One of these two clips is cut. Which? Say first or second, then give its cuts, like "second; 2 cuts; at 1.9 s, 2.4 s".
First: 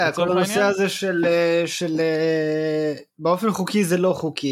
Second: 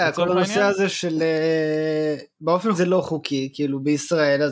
second; 2 cuts; at 0.9 s, 2.7 s